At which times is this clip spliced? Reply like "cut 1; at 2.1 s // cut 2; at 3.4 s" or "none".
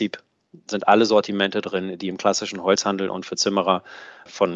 none